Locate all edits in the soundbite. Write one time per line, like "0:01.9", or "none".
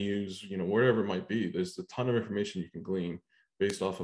none